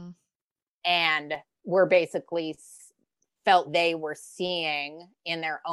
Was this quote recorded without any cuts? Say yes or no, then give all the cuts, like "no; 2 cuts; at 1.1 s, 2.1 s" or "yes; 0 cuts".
no; 1 cut; at 3.6 s